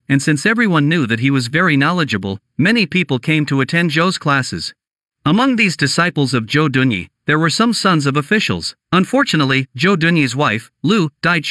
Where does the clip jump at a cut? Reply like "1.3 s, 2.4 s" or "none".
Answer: 4.9 s, 8.8 s